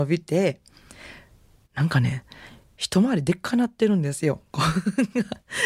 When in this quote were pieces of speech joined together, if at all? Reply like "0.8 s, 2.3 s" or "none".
none